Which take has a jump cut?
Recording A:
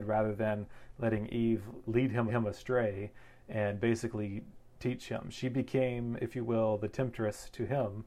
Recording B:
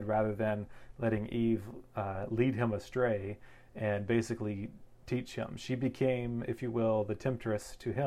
A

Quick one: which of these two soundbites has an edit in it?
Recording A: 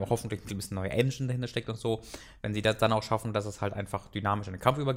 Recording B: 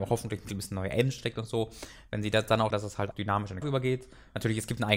B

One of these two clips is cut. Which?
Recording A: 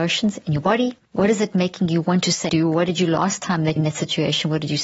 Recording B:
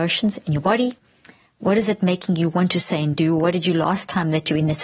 A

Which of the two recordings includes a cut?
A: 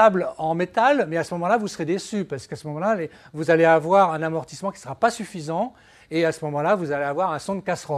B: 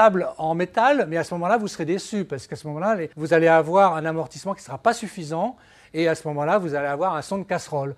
B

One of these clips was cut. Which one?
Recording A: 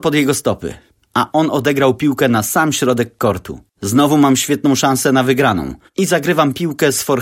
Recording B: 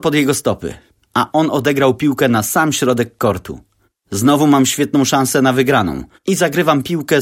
A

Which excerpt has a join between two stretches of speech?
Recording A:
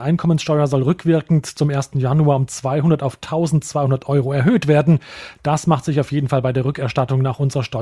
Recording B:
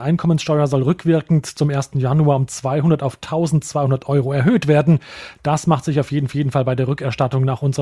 B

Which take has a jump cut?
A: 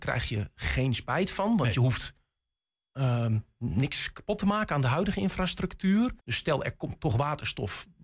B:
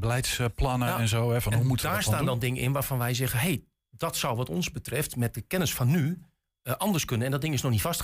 A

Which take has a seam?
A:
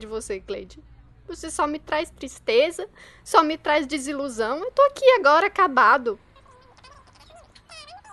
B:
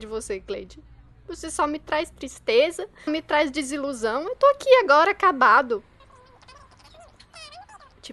B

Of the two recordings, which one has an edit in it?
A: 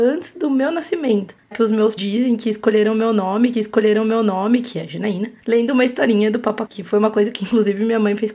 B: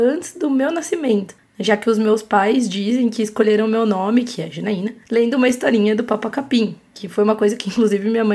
A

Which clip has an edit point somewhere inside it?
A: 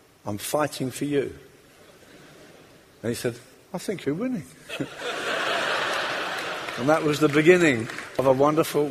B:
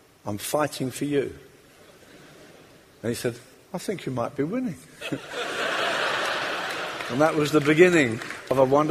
A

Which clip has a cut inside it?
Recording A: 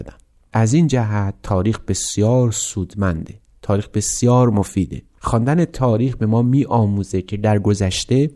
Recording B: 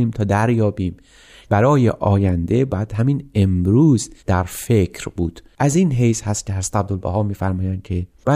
B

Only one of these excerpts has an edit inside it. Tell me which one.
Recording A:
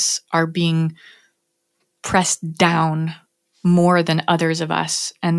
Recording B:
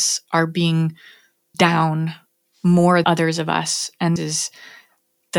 B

